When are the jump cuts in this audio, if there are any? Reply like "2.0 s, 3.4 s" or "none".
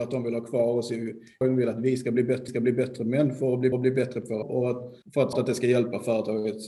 1.4 s, 2.5 s, 3.7 s, 4.4 s, 5.0 s, 5.3 s

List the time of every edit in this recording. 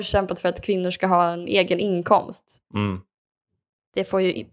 2.7 s

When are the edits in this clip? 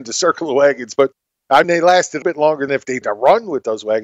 1.6 s, 2.2 s, 2.7 s, 3.0 s

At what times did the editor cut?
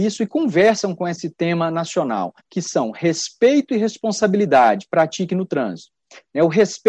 2.4 s

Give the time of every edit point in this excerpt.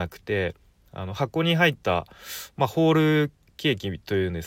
none

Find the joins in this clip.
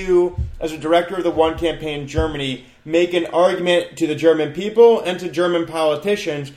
none

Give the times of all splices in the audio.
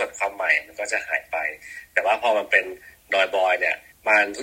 none

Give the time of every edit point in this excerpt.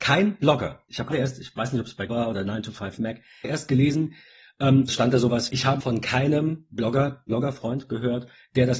1.1 s, 2.1 s, 3.4 s, 4.9 s, 5.5 s, 5.8 s, 7.3 s

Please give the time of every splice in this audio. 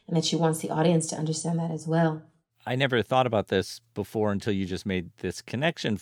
none

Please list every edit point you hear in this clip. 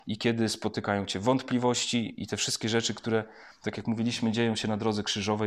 2.2 s

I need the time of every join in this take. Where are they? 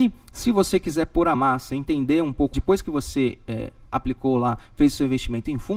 1.3 s, 2.5 s

